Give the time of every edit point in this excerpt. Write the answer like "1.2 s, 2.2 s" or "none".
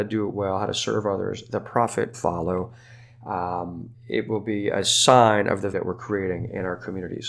2.1 s, 3.9 s, 5.7 s